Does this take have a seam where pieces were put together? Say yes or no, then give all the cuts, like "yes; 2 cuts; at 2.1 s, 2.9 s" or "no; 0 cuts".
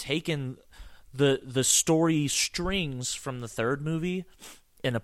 no; 0 cuts